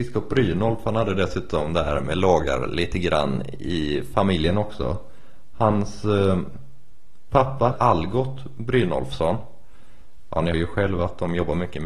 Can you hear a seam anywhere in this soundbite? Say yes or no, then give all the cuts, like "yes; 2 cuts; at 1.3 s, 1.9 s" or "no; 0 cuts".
yes; 2 cuts; at 7.7 s, 10.5 s